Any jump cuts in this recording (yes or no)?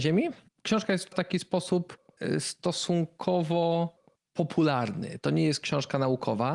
yes